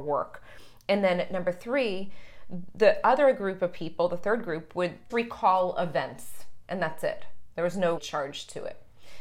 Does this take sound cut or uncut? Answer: cut